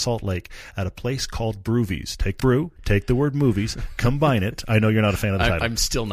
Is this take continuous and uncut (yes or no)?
no